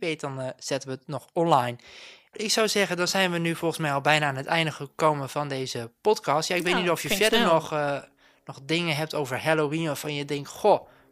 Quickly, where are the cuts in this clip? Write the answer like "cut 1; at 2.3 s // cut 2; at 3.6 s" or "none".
none